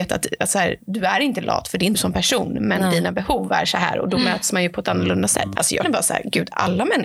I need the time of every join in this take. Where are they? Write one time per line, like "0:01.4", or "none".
0:01.9
0:05.8

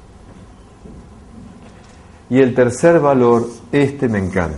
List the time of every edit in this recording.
none

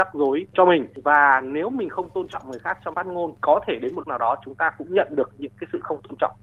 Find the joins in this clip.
0:02.9
0:04.0

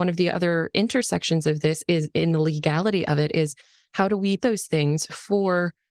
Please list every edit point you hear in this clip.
0:04.4

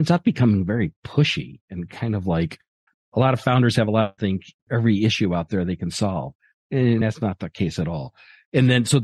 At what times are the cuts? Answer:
0:02.9
0:04.2
0:04.6
0:07.0

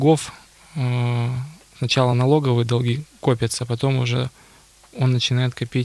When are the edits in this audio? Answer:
none

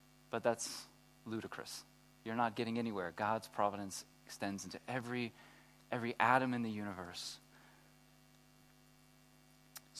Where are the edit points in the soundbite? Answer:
none

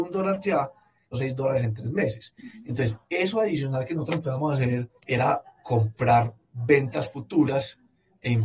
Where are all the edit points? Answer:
0:01.1
0:05.0

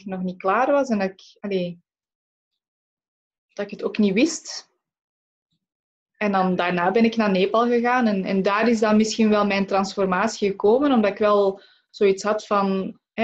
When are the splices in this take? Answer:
none

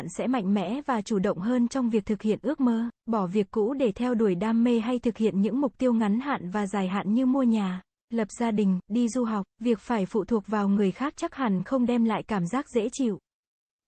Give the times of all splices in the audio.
0:03.0
0:07.9
0:09.5

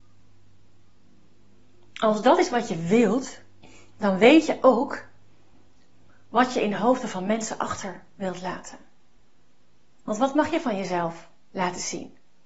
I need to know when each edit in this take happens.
none

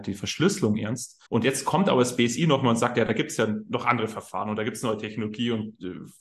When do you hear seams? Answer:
0:01.3

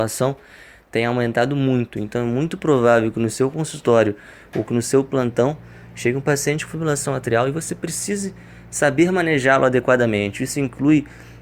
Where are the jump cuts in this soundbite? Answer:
none

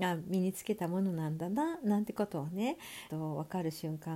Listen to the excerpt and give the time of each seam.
0:03.1

